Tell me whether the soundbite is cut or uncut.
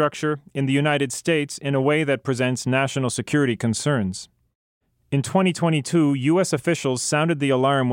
uncut